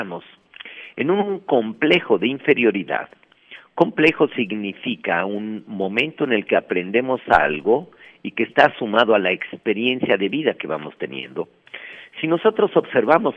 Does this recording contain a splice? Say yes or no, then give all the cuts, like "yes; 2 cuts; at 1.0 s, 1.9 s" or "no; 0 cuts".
no; 0 cuts